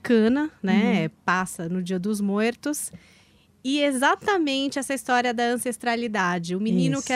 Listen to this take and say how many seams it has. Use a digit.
0